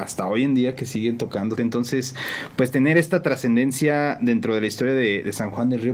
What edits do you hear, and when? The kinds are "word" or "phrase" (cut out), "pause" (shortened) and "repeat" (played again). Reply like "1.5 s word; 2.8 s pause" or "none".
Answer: 1.6 s phrase

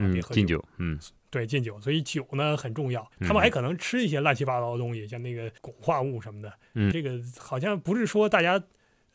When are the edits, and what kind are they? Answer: 1.2 s pause; 3.1 s pause; 5.6 s pause; 6.9 s phrase

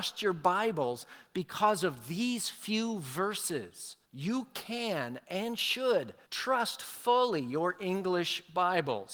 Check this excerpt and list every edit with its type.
4.0 s pause; 6.2 s pause

